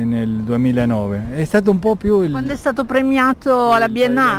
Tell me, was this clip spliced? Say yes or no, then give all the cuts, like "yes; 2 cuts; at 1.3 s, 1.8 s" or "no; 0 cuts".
no; 0 cuts